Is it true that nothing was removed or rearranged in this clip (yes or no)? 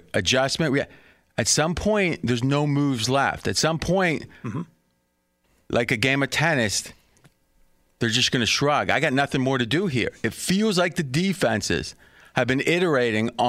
yes